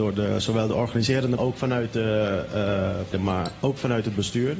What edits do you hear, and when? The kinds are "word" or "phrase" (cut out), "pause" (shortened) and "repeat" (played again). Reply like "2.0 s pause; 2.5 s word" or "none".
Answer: 1.4 s phrase; 3.1 s word